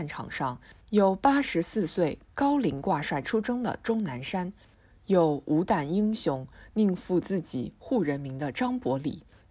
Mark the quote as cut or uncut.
uncut